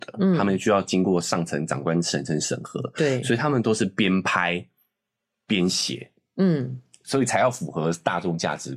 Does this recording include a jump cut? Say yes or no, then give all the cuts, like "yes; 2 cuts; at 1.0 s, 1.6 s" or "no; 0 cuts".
no; 0 cuts